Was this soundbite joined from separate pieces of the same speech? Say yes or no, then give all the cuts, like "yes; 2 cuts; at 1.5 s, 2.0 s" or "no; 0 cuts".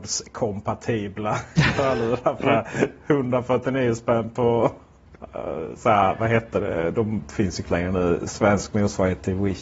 yes; 1 cut; at 7.6 s